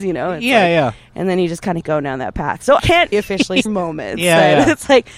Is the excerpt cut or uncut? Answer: cut